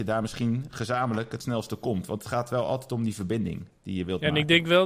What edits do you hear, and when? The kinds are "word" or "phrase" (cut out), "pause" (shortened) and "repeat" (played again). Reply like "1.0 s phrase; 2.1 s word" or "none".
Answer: none